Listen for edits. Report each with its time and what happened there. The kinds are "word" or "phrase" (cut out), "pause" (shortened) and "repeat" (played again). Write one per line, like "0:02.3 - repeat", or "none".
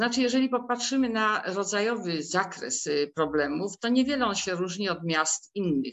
none

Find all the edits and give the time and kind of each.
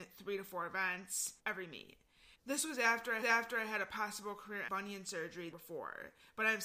0:01.4 - pause
0:02.3 - pause
0:03.2 - repeat
0:04.7 - word
0:05.5 - phrase

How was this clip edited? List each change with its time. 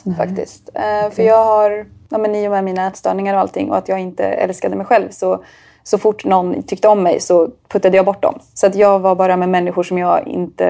none

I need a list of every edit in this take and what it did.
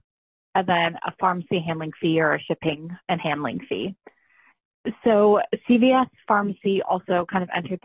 0:03.0 - pause

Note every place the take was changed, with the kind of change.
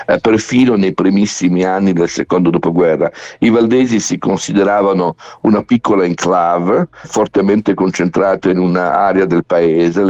0:07.0 - word

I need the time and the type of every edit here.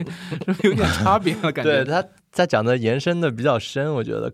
0:01.9 - word

